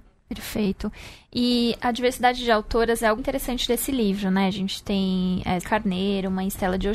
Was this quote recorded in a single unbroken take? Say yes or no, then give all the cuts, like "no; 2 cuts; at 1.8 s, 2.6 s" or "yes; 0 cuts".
no; 3 cuts; at 1.8 s, 3.2 s, 5.6 s